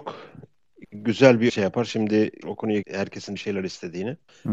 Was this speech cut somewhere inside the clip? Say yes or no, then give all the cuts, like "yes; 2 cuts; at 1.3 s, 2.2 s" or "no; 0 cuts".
yes; 4 cuts; at 1.5 s, 2.4 s, 2.8 s, 3.4 s